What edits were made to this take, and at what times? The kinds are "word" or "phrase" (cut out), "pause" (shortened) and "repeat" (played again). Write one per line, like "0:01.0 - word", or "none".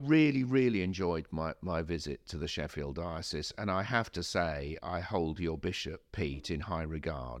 none